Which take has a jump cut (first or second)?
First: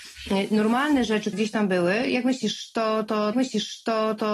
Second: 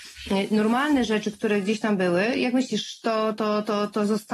first